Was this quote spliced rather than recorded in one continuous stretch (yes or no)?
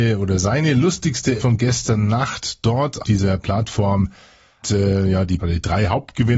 yes